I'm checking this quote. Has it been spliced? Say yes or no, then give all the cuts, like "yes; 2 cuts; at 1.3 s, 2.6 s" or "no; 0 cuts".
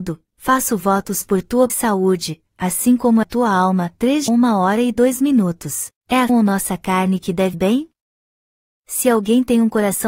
yes; 6 cuts; at 1.7 s, 3.2 s, 4.3 s, 6.0 s, 6.3 s, 7.5 s